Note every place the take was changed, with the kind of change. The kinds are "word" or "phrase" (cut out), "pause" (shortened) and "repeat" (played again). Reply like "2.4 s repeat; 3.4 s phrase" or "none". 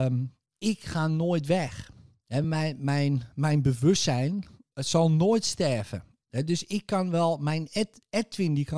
none